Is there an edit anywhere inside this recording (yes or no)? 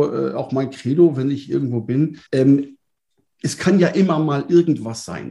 yes